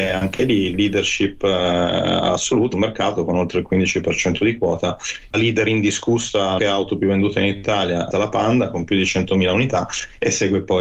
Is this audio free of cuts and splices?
no; 4 cuts; at 2.7 s, 5.3 s, 6.6 s, 8.1 s

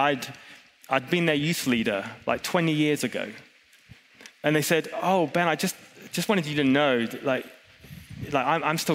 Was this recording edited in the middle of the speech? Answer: no; 0 cuts

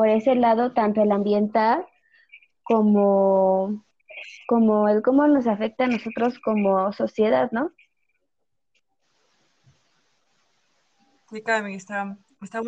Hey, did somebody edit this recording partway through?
no; 0 cuts

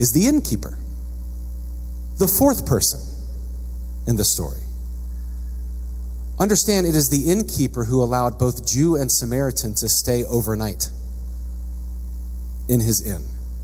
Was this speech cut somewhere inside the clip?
no; 0 cuts

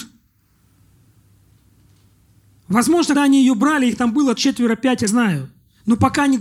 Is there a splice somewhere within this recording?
yes; 3 cuts; at 3.1 s, 4.4 s, 5.1 s

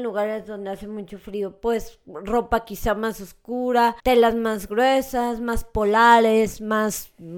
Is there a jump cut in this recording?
yes; 1 cut; at 4.0 s

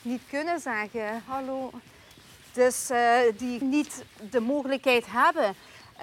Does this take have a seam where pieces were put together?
yes; 1 cut; at 3.6 s

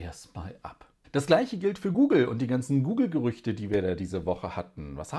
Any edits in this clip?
no; 0 cuts

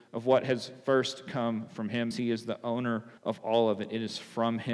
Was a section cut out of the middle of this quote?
yes; 2 cuts; at 2.1 s, 3.2 s

